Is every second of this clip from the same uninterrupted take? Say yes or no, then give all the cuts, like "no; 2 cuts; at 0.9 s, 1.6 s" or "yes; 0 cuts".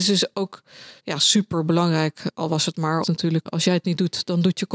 no; 3 cuts; at 1.0 s, 3.0 s, 3.5 s